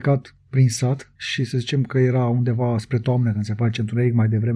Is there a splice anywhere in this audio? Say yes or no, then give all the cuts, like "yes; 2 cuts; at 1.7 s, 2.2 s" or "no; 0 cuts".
yes; 1 cut; at 1.2 s